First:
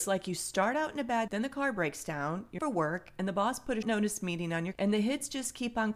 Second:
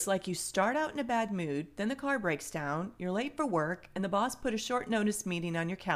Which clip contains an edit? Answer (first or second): first